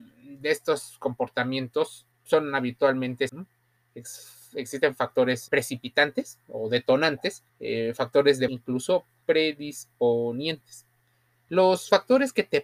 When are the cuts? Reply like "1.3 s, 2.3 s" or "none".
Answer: 2.1 s, 3.3 s, 5.5 s, 7.5 s, 8.5 s, 9.2 s